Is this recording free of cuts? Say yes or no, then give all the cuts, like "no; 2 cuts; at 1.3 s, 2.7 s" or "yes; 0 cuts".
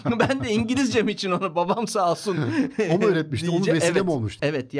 yes; 0 cuts